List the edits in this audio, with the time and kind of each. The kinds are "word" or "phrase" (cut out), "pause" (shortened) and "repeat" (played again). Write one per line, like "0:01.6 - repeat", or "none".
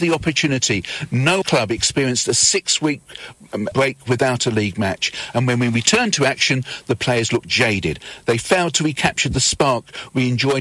0:01.4 - word
0:03.7 - word